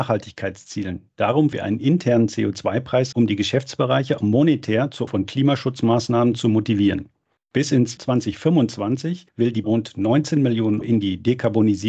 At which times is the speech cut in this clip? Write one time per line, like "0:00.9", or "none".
0:01.5
0:03.1
0:04.2
0:05.1
0:08.0
0:09.6
0:10.8